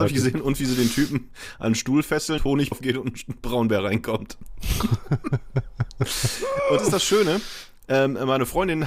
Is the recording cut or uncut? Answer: cut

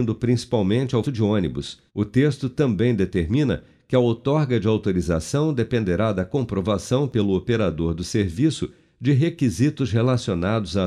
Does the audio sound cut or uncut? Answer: cut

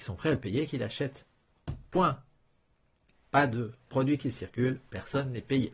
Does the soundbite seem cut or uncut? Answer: cut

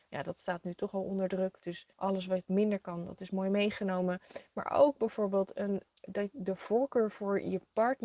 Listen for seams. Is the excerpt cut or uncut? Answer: cut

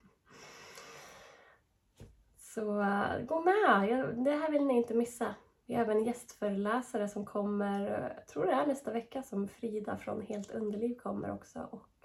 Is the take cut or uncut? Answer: uncut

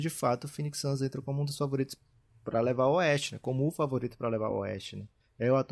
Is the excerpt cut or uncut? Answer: uncut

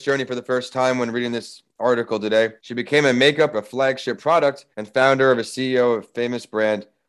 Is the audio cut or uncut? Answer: cut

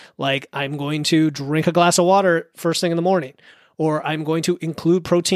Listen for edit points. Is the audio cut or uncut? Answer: uncut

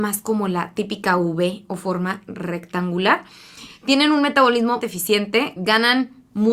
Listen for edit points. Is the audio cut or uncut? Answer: cut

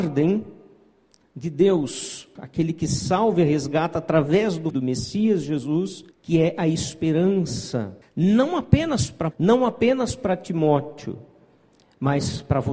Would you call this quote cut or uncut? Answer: cut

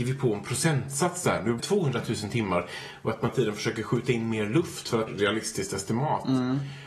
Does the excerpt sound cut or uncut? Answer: cut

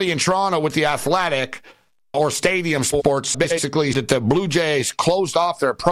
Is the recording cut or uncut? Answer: cut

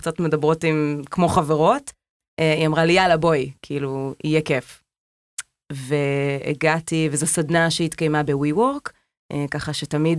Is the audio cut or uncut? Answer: uncut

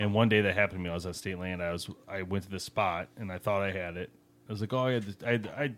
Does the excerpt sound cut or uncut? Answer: uncut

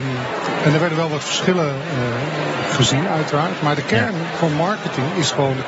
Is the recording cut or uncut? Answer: uncut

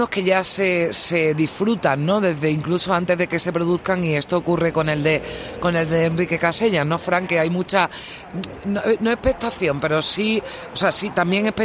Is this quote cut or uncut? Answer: uncut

